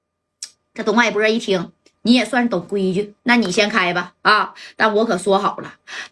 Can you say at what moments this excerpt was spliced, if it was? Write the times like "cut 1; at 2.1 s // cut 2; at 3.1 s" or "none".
cut 1; at 1.9 s // cut 2; at 3.2 s